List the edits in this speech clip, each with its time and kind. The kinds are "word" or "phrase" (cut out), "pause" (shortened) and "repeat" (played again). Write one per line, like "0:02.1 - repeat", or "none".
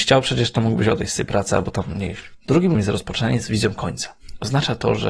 0:02.7 - word